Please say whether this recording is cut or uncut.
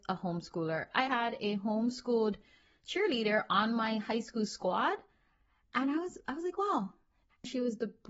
cut